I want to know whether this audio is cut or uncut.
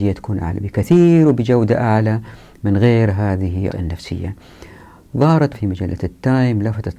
cut